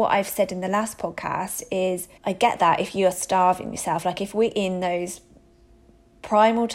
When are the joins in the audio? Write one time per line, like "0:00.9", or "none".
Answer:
0:02.2